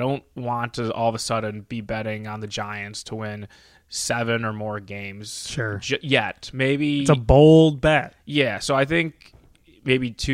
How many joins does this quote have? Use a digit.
0